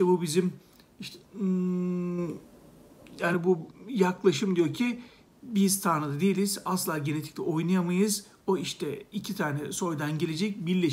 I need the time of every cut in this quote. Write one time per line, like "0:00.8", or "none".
none